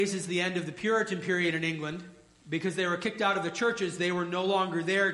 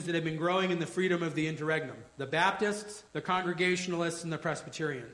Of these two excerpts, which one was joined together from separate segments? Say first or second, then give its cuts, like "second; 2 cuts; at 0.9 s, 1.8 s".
second; 2 cuts; at 2.1 s, 3.1 s